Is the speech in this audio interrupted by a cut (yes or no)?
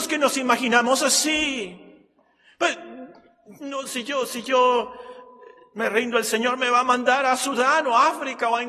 no